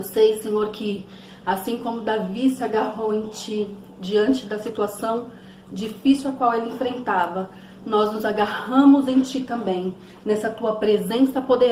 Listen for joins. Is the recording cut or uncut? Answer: uncut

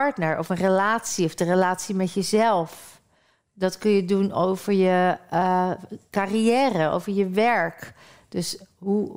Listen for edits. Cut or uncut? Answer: uncut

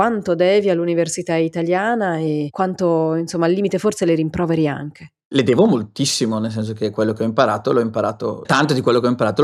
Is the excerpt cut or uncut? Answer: cut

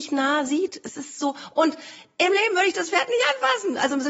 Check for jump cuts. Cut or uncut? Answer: uncut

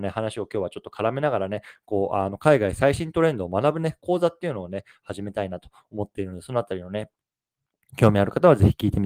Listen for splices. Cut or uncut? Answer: uncut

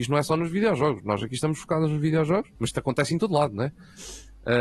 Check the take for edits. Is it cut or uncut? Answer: cut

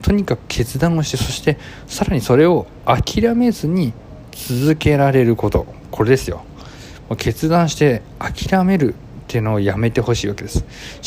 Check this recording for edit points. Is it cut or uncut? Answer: uncut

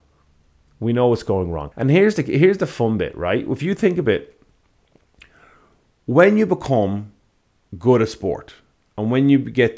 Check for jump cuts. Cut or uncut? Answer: cut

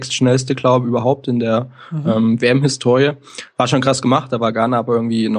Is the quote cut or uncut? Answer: uncut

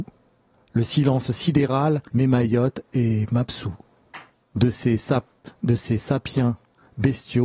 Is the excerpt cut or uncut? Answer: cut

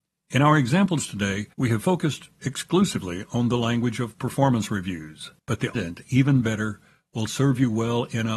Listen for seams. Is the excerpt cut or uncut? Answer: cut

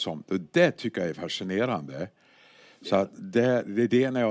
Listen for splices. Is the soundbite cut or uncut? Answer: uncut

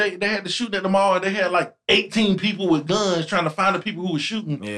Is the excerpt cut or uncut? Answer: uncut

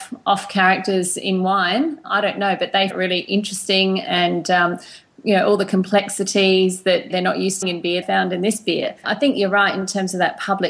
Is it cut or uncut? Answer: cut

